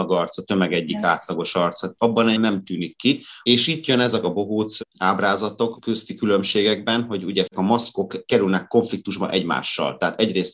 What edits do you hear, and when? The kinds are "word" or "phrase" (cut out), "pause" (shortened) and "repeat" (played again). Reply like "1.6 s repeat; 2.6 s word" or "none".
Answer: 2.4 s word; 4.2 s phrase; 7.5 s word